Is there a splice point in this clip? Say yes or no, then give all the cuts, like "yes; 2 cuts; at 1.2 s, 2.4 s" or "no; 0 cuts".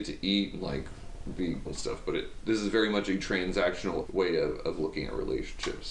yes; 3 cuts; at 1.7 s, 2.4 s, 4.1 s